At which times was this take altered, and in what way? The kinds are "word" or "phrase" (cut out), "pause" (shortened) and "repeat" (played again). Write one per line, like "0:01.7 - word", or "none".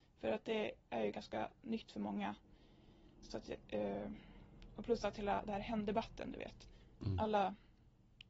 none